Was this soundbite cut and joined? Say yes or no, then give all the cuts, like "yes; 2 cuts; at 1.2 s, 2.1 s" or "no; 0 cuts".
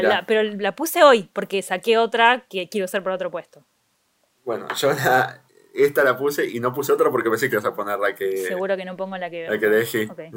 yes; 1 cut; at 7.5 s